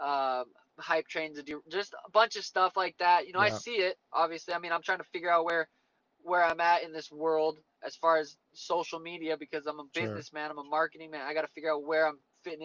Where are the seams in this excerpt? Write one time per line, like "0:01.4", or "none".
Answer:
none